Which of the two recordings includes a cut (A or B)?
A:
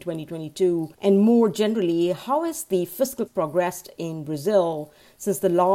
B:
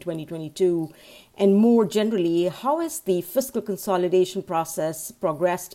A